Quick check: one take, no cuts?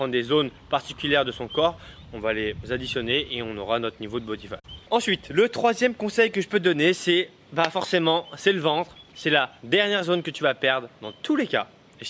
no; 1 cut; at 9.6 s

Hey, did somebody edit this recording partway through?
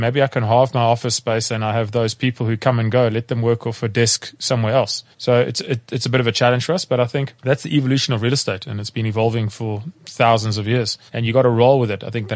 yes; 4 cuts; at 5.1 s, 7.4 s, 10.0 s, 11.1 s

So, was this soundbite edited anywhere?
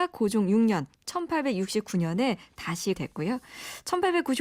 yes; 1 cut; at 2.9 s

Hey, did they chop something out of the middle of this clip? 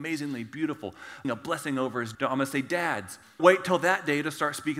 yes; 3 cuts; at 1.2 s, 2.1 s, 3.4 s

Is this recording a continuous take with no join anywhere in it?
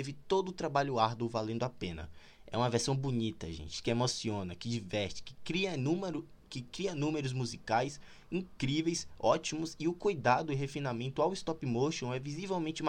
yes; 0 cuts

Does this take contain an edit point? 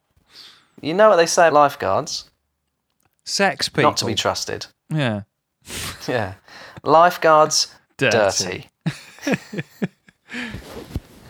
yes; 2 cuts; at 1.5 s, 7.8 s

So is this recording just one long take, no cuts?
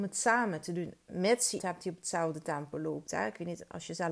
no; 1 cut; at 1.6 s

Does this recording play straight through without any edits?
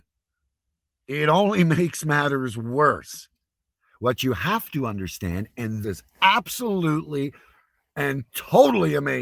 no; 1 cut; at 5.8 s

